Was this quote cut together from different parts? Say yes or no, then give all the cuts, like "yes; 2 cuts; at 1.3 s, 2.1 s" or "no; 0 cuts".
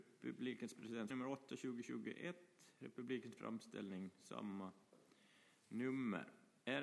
yes; 2 cuts; at 1.1 s, 3.4 s